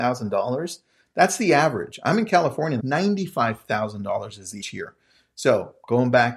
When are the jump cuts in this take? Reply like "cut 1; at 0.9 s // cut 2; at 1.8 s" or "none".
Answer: cut 1; at 2.8 s // cut 2; at 4.6 s